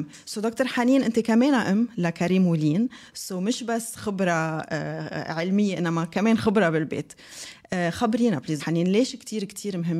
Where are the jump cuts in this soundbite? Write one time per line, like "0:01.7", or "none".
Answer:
0:08.6